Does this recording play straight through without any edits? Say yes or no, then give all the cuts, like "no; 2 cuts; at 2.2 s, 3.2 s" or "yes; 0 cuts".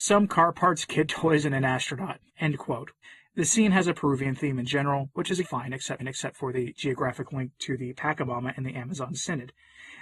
no; 4 cuts; at 2.3 s, 3.0 s, 5.4 s, 6.0 s